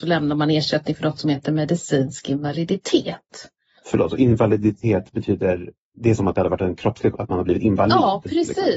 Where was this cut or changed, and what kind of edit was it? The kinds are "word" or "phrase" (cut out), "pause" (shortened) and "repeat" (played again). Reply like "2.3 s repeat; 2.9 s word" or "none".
6.2 s word; 7.1 s word